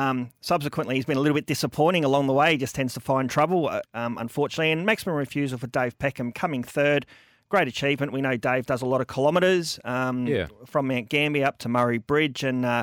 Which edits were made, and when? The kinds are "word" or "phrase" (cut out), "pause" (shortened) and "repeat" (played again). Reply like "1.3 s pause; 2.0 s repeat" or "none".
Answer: 3.8 s word

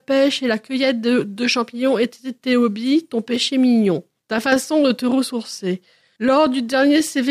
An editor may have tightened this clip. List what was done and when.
none

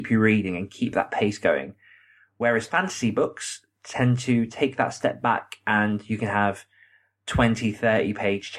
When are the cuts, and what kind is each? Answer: none

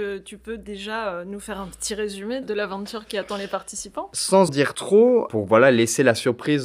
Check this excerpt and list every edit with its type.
2.4 s word; 4.5 s word

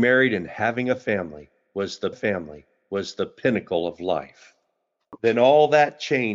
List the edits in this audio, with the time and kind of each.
2.1 s repeat

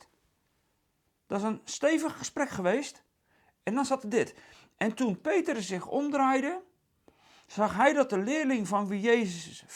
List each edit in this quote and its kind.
none

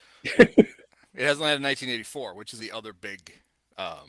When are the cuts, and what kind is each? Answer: 2.6 s word

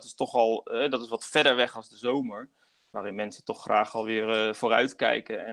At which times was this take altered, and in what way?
none

